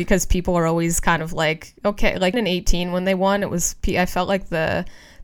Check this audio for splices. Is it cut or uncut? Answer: cut